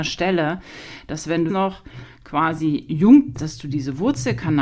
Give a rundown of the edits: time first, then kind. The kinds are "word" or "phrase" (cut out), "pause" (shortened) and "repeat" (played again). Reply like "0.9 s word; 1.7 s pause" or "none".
1.5 s word; 3.3 s word